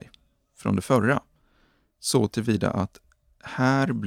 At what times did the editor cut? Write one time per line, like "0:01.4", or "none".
none